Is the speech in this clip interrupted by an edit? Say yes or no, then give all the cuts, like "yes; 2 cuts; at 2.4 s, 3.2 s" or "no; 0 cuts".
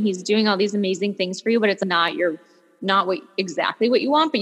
no; 0 cuts